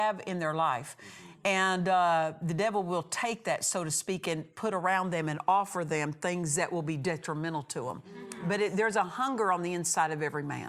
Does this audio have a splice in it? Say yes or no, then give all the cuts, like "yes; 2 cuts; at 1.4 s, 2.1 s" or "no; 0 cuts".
no; 0 cuts